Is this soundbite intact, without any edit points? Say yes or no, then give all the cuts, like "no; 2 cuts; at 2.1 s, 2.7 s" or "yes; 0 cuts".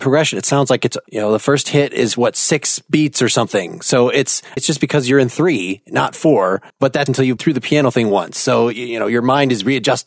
no; 4 cuts; at 4.6 s, 6.7 s, 7.1 s, 7.4 s